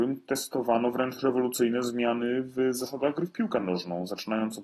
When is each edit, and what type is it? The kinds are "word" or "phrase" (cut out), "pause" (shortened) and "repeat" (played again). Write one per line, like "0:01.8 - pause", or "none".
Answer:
none